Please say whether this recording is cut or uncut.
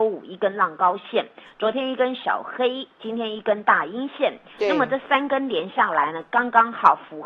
uncut